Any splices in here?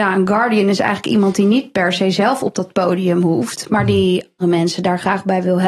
yes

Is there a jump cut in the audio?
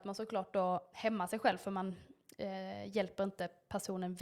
yes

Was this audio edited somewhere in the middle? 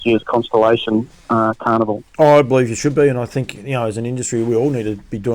yes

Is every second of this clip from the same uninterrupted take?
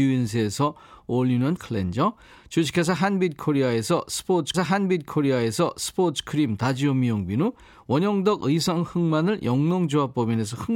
no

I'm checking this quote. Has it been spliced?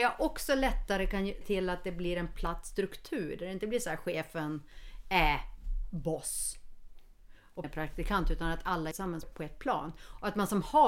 yes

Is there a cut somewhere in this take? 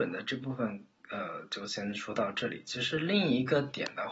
no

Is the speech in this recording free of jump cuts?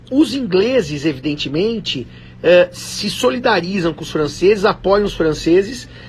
yes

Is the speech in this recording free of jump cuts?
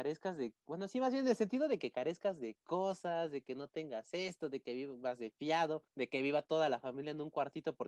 no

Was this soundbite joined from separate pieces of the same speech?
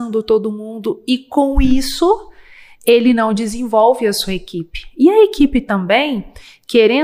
no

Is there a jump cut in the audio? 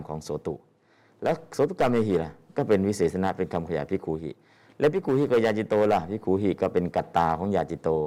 no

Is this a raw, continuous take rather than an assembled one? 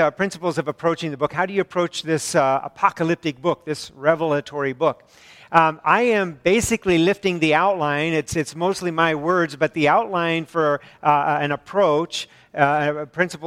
yes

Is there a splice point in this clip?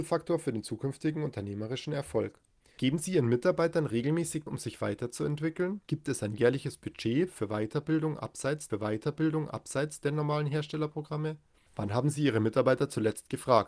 yes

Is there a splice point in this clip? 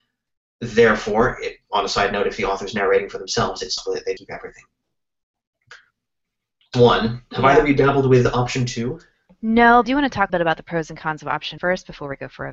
yes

